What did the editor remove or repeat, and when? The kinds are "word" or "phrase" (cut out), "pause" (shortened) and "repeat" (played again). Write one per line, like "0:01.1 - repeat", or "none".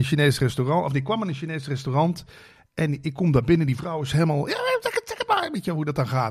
none